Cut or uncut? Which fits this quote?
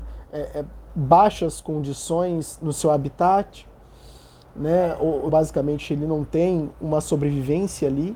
cut